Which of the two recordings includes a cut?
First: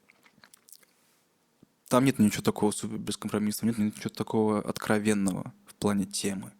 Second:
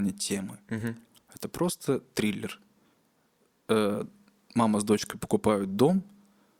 first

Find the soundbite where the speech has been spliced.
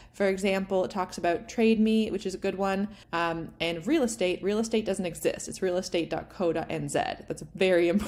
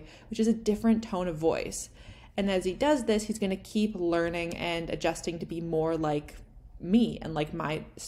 first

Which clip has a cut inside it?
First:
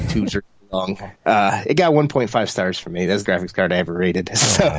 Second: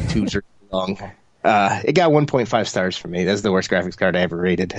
first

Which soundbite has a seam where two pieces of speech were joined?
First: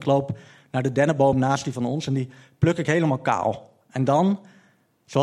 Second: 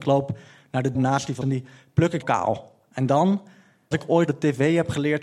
second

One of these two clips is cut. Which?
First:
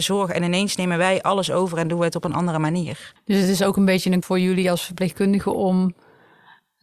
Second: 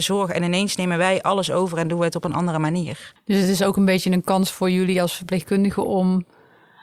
first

